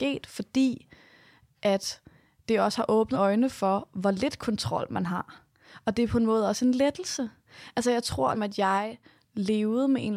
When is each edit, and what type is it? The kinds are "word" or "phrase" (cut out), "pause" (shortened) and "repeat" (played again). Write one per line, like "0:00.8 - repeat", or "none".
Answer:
0:03.1 - word
0:08.3 - word